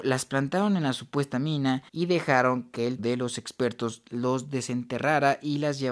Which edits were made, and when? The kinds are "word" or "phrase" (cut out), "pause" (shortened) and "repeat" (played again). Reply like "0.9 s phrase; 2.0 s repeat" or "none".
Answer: 1.9 s pause; 3.0 s word